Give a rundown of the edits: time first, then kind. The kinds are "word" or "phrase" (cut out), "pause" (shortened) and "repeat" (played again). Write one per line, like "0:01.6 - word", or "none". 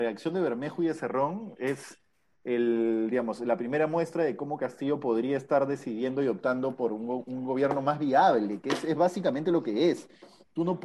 none